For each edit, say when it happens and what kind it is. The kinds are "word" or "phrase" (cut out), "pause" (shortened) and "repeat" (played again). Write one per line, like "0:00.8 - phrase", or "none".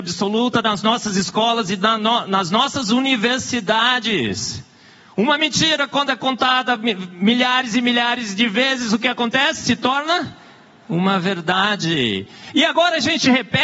none